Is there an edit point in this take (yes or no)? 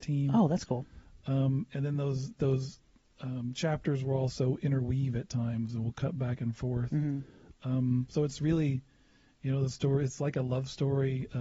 no